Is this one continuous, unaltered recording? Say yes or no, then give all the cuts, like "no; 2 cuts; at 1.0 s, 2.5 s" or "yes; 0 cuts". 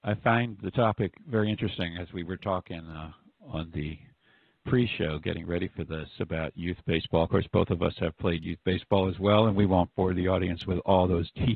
yes; 0 cuts